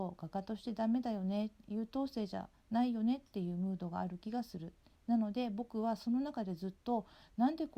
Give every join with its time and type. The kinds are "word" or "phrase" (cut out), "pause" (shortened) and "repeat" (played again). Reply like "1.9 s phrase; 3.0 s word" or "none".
2.5 s pause